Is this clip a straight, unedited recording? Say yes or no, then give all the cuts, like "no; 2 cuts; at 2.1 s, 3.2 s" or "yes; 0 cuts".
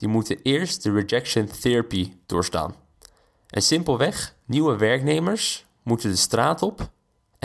no; 2 cuts; at 2.2 s, 4.4 s